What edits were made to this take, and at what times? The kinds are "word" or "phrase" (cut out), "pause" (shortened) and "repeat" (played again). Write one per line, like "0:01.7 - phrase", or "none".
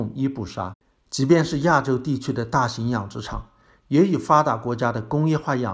none